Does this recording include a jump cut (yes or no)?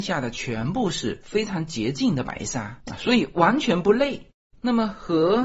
yes